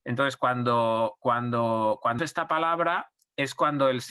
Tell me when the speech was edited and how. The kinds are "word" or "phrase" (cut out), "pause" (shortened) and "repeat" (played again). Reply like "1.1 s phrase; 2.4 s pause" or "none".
2.2 s word